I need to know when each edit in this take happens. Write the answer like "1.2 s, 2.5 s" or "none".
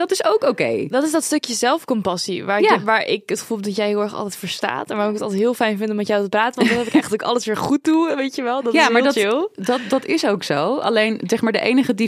7.1 s